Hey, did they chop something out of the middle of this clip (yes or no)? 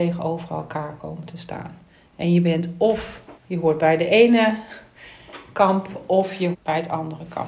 yes